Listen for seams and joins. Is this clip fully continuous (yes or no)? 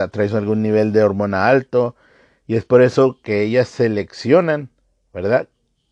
yes